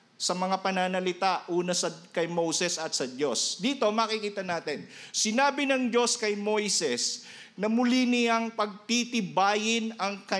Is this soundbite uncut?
yes; 0 cuts

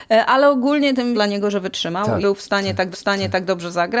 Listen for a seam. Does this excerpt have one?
yes; 3 cuts; at 1.1 s, 2.2 s, 2.9 s

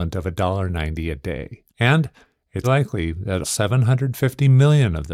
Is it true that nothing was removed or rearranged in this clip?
no; 3 cuts; at 1.7 s, 2.6 s, 3.4 s

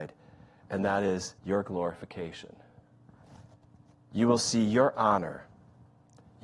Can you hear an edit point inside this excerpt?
yes; 2 cuts; at 1.4 s, 3.6 s

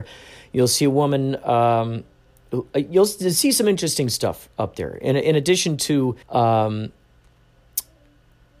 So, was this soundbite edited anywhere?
yes; 1 cut; at 6.2 s

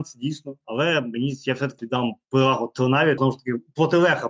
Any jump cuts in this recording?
yes; 2 cuts; at 1.8 s, 3.2 s

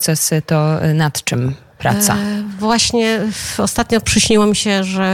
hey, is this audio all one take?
yes; 0 cuts

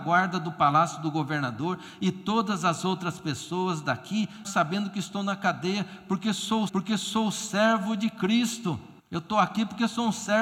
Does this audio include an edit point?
yes; 3 cuts; at 4.4 s, 6.7 s, 9.0 s

